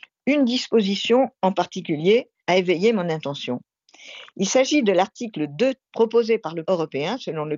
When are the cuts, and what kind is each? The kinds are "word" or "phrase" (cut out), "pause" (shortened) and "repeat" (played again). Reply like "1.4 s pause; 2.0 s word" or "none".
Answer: 2.4 s pause; 5.8 s word; 6.6 s word